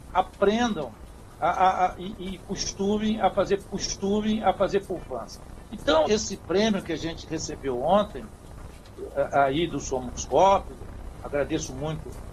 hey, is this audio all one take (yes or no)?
no